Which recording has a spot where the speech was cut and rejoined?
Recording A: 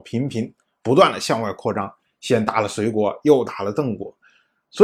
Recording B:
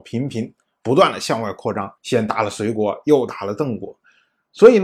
B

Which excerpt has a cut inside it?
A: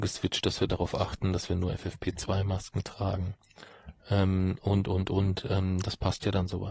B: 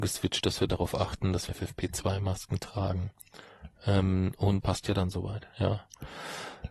B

